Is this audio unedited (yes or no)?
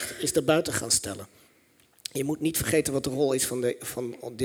yes